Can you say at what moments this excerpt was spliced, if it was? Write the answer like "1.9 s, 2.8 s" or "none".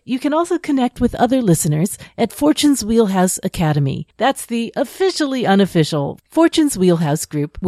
4.1 s